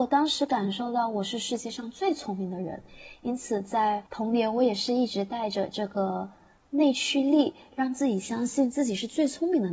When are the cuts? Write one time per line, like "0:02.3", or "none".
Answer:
0:04.1